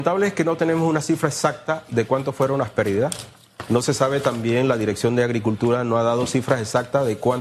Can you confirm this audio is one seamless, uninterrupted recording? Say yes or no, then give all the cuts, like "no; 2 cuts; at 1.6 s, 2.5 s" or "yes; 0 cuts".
yes; 0 cuts